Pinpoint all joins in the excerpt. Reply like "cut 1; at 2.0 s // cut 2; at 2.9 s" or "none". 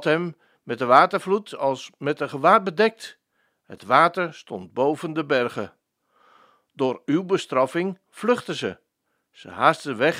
none